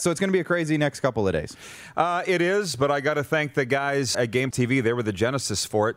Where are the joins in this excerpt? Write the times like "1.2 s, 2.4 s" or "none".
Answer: 4.1 s, 4.5 s

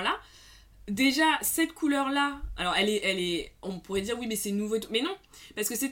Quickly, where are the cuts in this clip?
none

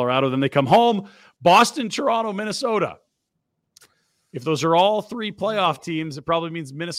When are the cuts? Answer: none

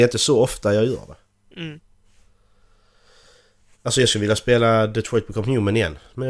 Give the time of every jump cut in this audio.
none

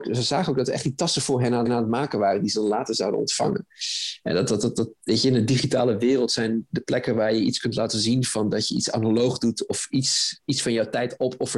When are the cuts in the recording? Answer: 1.7 s

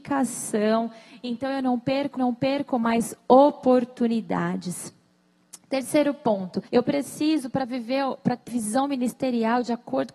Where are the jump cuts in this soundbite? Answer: 2.2 s, 6.7 s, 8.5 s

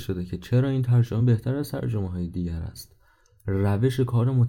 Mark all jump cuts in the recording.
none

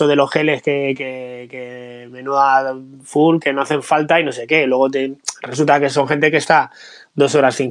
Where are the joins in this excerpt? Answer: none

